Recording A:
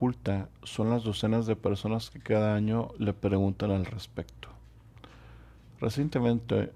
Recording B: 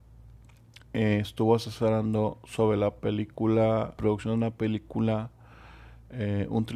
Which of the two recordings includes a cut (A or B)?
B